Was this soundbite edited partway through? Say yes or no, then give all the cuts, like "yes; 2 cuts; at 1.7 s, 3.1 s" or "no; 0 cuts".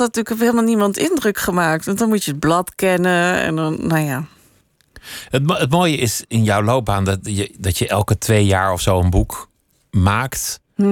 no; 0 cuts